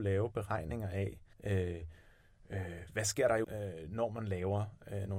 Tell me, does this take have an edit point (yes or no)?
yes